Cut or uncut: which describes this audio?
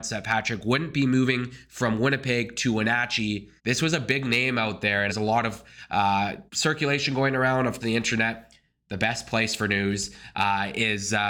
cut